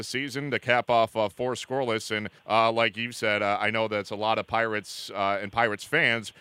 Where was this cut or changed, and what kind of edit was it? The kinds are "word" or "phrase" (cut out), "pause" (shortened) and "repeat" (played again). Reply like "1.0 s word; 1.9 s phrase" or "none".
2.4 s pause